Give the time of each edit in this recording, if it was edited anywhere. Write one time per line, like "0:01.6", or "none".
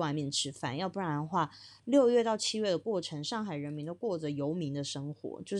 0:01.8

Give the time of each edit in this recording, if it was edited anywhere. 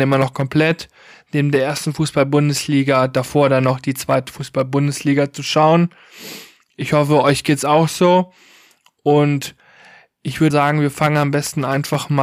0:10.5

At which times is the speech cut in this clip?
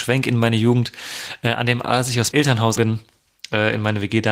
0:01.8
0:02.3
0:02.8

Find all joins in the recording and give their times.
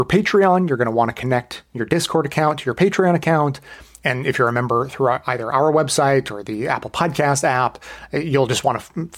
none

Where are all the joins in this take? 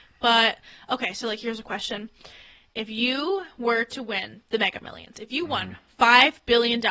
none

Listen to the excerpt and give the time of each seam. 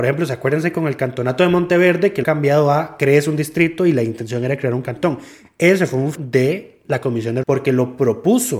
0:02.2
0:06.1
0:07.4

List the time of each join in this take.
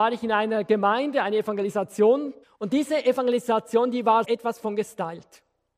0:02.4
0:04.2

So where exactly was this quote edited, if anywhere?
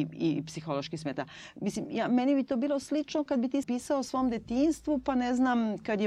0:03.3
0:03.6

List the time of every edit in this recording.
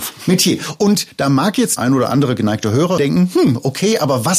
0:01.8
0:03.0

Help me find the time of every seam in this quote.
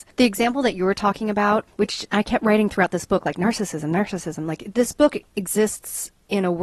none

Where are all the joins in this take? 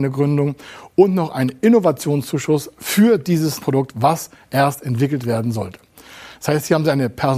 0:03.6

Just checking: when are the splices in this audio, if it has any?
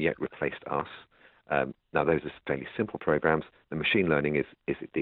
none

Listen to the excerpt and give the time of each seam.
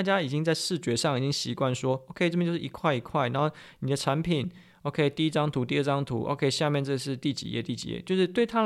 none

